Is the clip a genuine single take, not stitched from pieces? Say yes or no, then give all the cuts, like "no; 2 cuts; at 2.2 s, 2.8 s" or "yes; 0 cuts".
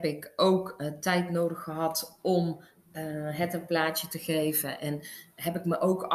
yes; 0 cuts